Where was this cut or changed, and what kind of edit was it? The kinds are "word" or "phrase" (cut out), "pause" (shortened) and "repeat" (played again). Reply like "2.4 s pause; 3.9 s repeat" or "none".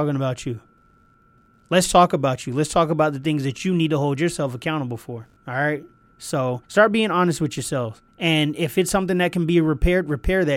5.4 s pause; 6.6 s pause; 8.1 s pause